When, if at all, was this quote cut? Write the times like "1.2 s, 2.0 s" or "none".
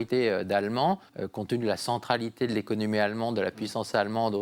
1.1 s